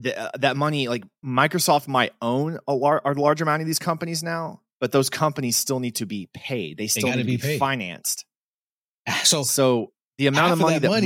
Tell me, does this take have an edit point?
no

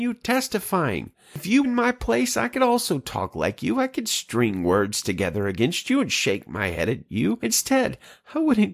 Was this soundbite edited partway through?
yes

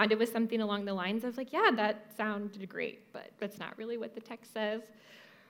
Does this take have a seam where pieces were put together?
no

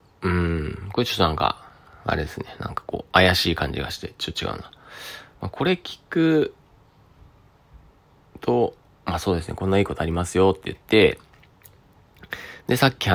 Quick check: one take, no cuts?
yes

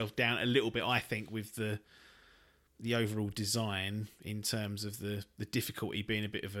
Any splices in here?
no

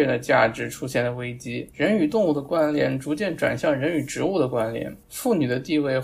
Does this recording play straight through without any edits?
no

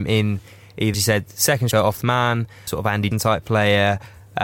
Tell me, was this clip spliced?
yes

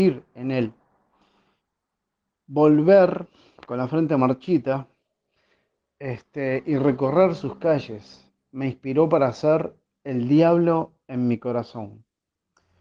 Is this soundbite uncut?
yes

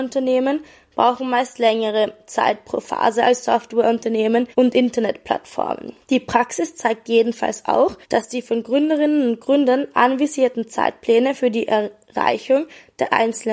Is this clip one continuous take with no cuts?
no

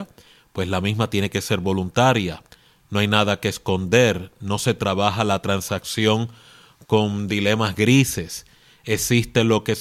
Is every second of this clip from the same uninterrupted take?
yes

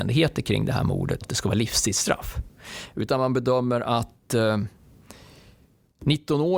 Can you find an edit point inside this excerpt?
yes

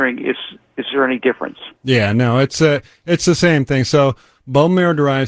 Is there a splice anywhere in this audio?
yes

